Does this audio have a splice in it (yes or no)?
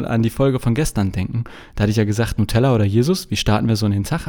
no